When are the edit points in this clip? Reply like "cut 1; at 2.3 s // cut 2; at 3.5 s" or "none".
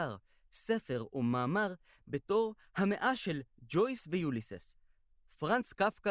none